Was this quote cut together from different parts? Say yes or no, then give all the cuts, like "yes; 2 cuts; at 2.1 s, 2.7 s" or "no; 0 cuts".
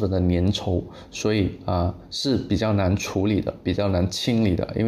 no; 0 cuts